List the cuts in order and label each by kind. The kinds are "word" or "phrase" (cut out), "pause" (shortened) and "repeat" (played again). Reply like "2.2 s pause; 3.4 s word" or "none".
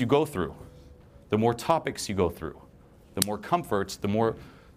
none

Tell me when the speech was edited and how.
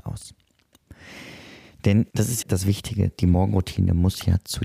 2.1 s pause; 2.4 s word

